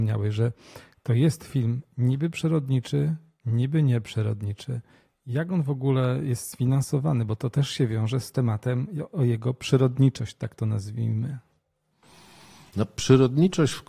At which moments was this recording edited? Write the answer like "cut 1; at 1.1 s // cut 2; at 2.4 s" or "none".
none